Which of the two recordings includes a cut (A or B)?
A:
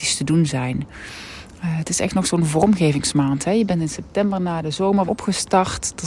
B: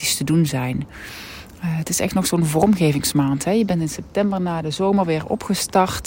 A